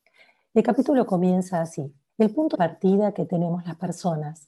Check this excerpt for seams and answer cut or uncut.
cut